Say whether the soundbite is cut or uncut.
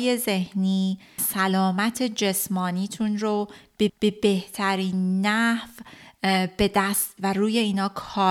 cut